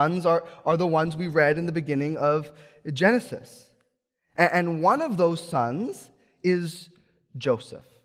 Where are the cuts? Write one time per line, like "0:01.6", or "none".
none